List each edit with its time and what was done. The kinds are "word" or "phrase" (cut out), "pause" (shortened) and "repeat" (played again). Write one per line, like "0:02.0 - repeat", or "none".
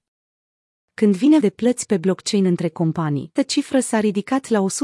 0:01.4 - word
0:03.4 - word